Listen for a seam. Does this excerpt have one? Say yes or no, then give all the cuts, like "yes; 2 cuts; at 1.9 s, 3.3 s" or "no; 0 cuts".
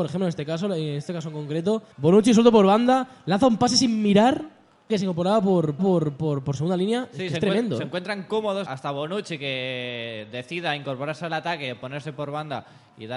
yes; 4 cuts; at 1.9 s, 4.9 s, 5.8 s, 8.7 s